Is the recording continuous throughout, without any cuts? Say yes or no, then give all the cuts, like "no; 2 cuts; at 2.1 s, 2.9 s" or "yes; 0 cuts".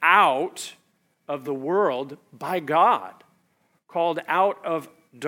yes; 0 cuts